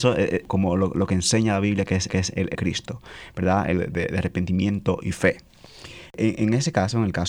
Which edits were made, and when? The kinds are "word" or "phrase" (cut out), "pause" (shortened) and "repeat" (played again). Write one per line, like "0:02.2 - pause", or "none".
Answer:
0:02.1 - repeat
0:02.5 - phrase
0:03.8 - word